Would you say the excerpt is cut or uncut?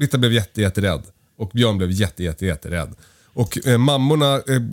uncut